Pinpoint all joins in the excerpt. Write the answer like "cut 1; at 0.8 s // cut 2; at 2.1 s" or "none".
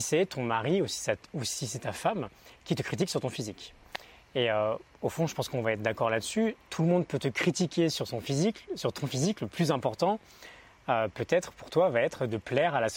none